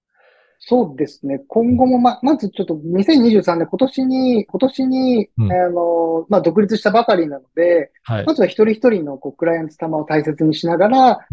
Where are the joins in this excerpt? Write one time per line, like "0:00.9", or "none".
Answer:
0:04.5